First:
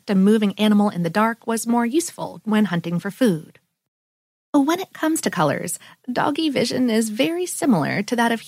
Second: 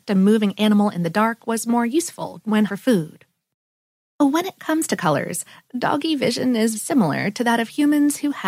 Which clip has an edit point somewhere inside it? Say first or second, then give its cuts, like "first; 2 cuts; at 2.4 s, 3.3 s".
second; 2 cuts; at 2.7 s, 6.7 s